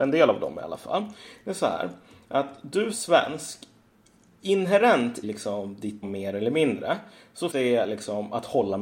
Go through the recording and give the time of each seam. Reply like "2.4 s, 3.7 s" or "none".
2.9 s, 5.2 s, 6.0 s, 7.5 s